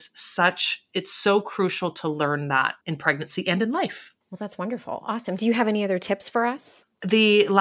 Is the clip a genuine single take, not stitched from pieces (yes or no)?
no